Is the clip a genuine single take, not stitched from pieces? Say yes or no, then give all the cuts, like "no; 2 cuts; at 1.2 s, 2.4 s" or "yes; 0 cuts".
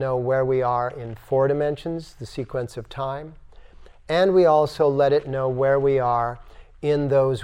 yes; 0 cuts